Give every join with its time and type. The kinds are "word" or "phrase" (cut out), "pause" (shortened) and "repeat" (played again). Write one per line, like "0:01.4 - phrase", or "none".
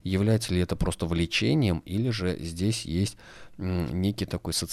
none